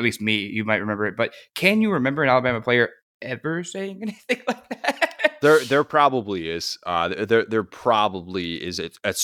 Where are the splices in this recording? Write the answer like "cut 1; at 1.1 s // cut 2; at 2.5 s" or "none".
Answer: cut 1; at 3.0 s